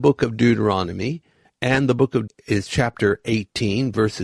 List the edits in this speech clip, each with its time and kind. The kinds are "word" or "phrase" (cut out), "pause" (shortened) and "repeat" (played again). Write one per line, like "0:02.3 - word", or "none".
0:01.5 - pause
0:02.3 - word